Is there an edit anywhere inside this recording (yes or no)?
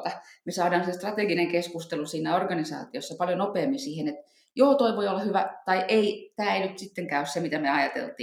no